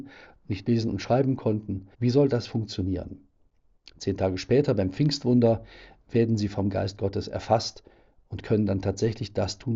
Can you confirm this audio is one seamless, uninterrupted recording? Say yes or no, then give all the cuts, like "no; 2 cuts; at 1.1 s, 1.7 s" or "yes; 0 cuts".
no; 1 cut; at 1.9 s